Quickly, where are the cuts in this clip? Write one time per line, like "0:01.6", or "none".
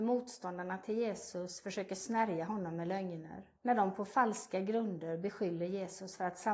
0:03.5